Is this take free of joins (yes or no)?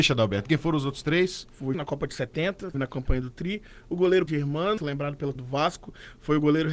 no